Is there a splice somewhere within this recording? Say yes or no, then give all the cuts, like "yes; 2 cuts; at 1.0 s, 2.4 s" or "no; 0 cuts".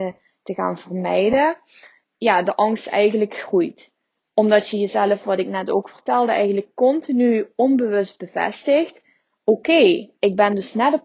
yes; 1 cut; at 2.0 s